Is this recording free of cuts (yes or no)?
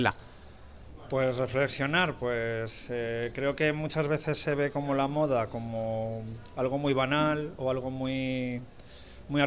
yes